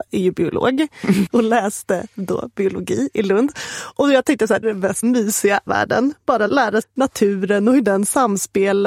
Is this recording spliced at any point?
yes; 5 cuts; at 1.3 s, 4.6 s, 5.0 s, 5.7 s, 6.8 s

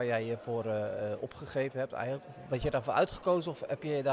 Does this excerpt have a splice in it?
no; 0 cuts

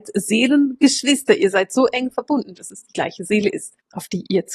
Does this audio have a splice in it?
no; 0 cuts

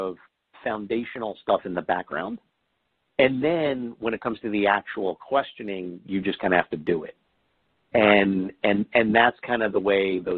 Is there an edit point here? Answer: no; 0 cuts

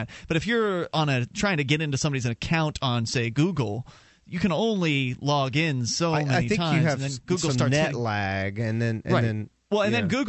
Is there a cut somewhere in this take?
no; 0 cuts

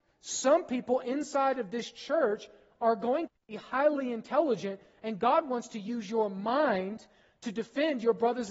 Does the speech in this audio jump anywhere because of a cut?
no; 0 cuts

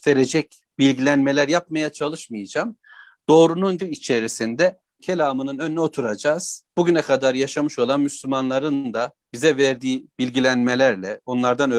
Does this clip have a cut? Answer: yes; 4 cuts; at 3.8 s, 5.0 s, 6.7 s, 9.2 s

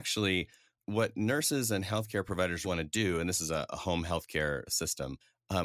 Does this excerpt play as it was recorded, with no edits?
no; 1 cut; at 2.6 s

